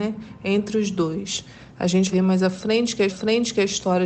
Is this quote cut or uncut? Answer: cut